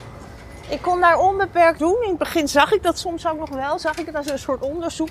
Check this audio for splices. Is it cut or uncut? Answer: cut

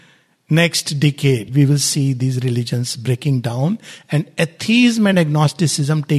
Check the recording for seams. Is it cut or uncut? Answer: uncut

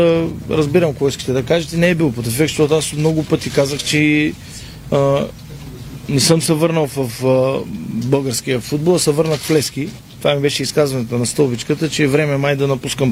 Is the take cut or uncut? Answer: uncut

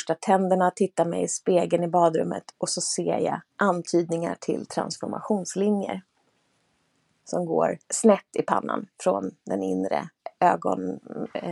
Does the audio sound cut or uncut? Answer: cut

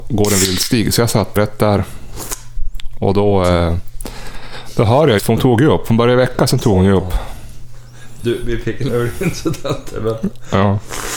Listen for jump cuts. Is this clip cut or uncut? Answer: cut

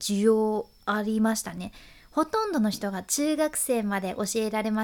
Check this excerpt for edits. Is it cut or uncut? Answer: uncut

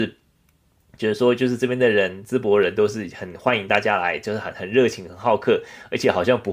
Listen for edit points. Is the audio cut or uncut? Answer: uncut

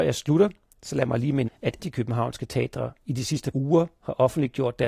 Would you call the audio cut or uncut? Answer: cut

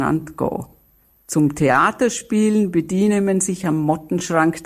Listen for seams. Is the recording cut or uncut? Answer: cut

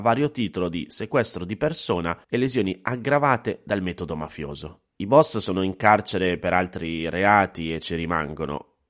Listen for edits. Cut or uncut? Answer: cut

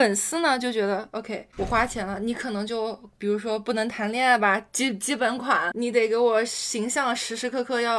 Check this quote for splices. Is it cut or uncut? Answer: cut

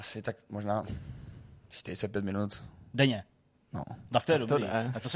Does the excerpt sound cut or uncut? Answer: uncut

